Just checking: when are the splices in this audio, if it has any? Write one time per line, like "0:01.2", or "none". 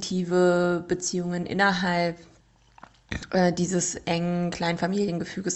none